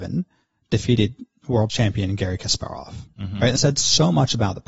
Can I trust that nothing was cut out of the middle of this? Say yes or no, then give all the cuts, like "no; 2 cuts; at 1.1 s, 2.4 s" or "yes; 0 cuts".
no; 2 cuts; at 1.7 s, 3.6 s